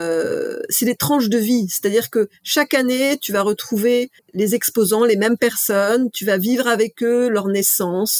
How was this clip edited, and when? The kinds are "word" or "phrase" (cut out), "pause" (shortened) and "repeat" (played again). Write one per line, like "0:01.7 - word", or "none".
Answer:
0:04.2 - pause